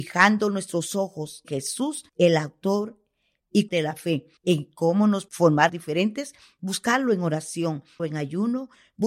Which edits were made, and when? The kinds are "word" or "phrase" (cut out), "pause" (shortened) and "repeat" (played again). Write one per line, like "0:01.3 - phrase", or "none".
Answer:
0:01.4 - word
0:02.1 - pause
0:03.7 - word
0:04.4 - pause
0:05.3 - word
0:05.7 - word
0:08.0 - word